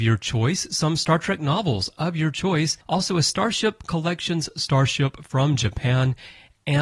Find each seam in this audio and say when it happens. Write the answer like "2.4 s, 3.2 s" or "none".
2.8 s